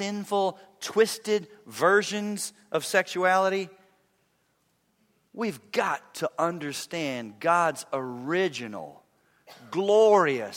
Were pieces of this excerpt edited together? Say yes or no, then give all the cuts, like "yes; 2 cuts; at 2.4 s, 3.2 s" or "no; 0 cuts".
no; 0 cuts